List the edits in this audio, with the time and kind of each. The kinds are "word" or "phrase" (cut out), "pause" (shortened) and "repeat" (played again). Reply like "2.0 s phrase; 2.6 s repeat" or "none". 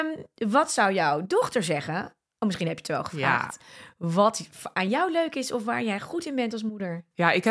none